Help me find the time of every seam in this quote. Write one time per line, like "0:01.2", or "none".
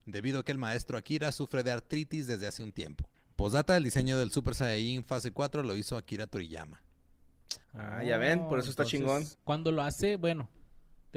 0:03.1
0:07.6
0:09.3